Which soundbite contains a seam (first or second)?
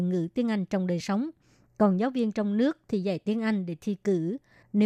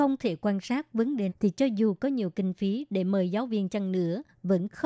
second